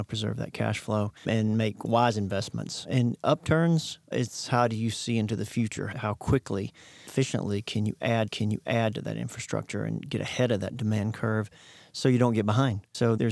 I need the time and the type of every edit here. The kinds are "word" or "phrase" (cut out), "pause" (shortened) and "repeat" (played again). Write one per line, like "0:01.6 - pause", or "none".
0:01.2 - pause
0:07.1 - word
0:08.3 - repeat